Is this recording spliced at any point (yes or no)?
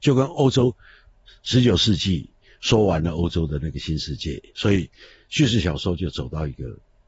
no